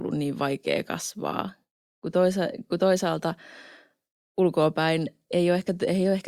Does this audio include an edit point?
no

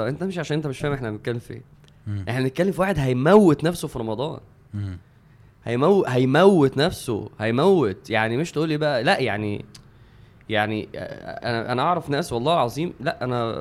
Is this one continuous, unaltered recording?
yes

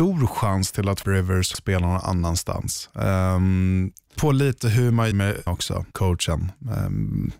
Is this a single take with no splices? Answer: no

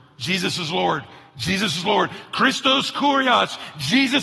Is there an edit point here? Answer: no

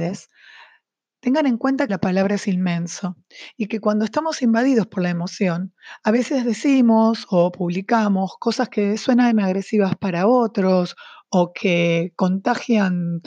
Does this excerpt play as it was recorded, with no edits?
no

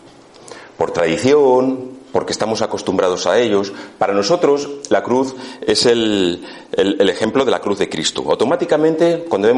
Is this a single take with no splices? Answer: yes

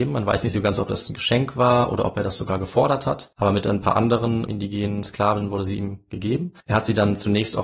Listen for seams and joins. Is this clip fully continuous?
no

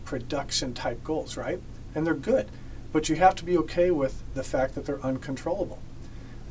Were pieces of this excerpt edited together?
no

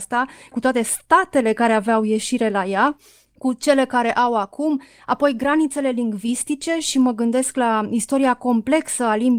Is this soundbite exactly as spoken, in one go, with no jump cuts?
yes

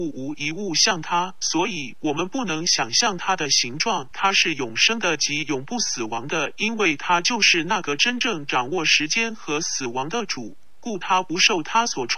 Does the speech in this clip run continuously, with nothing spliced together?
no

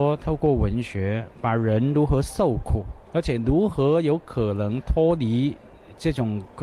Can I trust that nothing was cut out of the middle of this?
no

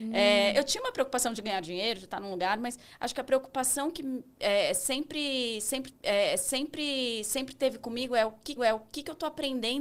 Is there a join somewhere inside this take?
yes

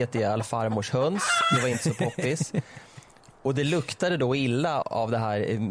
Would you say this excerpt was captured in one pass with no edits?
no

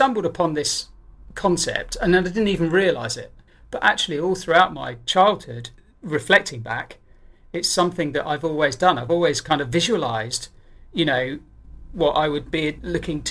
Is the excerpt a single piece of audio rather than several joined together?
yes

